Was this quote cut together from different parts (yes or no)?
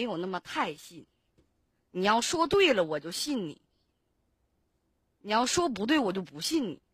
no